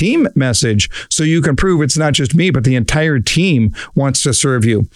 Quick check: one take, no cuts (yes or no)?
yes